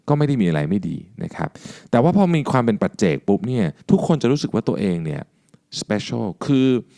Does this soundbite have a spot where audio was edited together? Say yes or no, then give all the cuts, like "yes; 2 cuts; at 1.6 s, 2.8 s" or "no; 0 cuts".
yes; 1 cut; at 3.8 s